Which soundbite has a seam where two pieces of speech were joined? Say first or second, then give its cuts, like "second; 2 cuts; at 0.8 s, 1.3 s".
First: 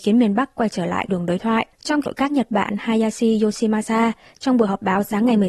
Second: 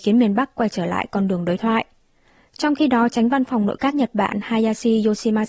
first; 3 cuts; at 1.1 s, 1.7 s, 2.1 s